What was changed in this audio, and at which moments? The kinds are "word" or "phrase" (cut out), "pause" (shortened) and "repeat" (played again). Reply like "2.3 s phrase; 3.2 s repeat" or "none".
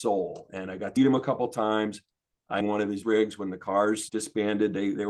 1.0 s word; 2.6 s phrase; 3.0 s word; 4.1 s word